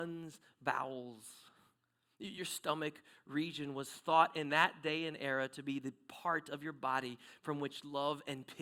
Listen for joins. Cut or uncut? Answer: uncut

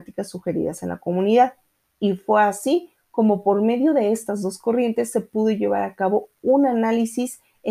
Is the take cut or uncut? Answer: uncut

